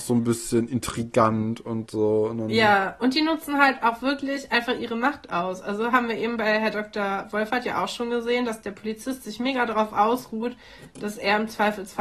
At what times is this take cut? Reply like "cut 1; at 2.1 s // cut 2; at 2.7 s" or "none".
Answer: none